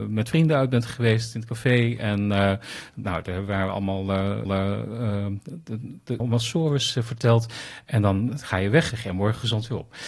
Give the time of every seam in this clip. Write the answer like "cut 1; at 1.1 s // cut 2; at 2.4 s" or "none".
cut 1; at 4.4 s // cut 2; at 6.2 s // cut 3; at 8.9 s